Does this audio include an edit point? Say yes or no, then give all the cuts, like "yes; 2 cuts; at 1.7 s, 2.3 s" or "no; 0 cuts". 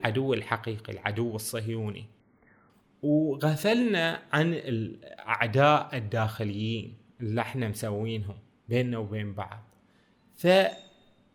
no; 0 cuts